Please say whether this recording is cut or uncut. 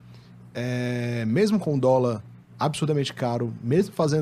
uncut